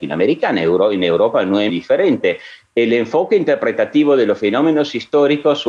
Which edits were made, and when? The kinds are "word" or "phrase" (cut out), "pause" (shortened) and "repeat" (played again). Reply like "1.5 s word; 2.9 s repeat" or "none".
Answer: 1.7 s word